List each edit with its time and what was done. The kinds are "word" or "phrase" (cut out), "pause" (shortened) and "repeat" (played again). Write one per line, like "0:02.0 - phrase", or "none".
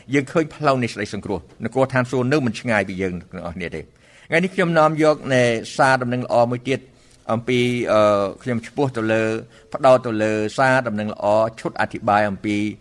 none